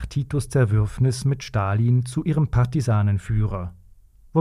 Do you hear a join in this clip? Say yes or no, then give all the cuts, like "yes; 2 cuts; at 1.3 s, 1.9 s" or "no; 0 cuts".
no; 0 cuts